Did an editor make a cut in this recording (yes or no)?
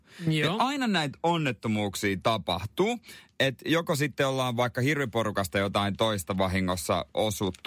no